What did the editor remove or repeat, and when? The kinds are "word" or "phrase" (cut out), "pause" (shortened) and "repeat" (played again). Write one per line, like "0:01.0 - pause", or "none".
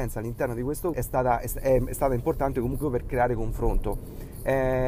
0:00.9 - phrase
0:02.8 - word